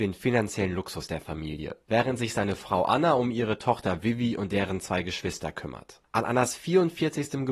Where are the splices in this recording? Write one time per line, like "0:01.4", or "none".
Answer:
none